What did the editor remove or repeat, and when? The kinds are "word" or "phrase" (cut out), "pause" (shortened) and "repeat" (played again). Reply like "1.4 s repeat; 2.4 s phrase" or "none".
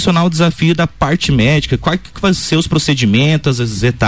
2.1 s word